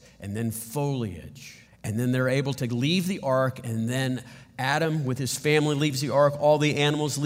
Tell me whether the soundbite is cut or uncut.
cut